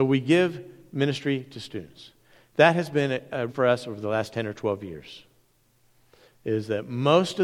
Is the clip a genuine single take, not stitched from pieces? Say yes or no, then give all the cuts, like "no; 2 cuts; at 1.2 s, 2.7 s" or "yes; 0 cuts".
no; 1 cut; at 3.5 s